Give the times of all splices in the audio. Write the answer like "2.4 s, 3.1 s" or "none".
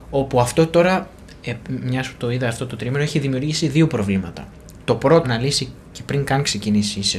5.2 s